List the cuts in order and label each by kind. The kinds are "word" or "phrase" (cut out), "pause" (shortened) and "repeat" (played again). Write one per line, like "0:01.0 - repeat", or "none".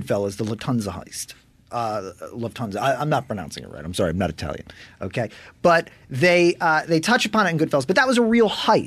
none